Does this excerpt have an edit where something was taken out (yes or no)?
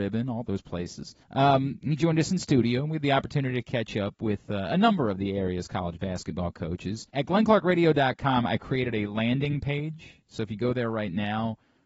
yes